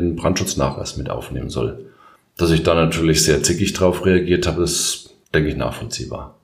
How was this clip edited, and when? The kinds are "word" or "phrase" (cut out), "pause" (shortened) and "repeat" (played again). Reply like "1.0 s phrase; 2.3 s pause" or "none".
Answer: 2.2 s pause; 5.2 s pause